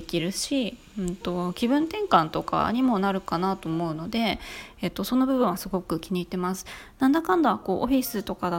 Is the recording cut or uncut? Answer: uncut